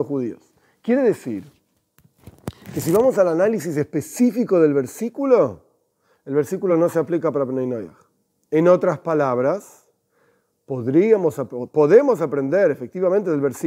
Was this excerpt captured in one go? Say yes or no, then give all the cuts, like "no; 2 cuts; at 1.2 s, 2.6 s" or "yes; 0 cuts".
yes; 0 cuts